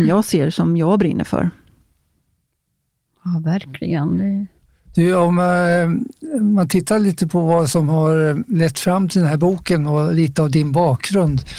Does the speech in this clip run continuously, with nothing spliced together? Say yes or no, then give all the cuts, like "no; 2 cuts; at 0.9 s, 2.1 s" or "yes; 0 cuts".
yes; 0 cuts